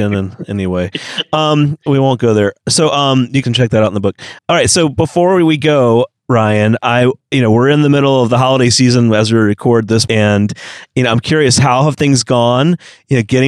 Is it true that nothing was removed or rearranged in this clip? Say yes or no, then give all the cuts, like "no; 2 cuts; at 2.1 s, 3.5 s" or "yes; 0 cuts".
no; 3 cuts; at 3.4 s, 4.4 s, 10.1 s